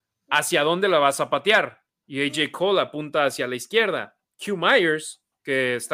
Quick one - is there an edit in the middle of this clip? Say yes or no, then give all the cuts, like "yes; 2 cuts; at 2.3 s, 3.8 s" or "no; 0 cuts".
no; 0 cuts